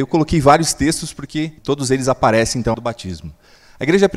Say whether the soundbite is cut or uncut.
cut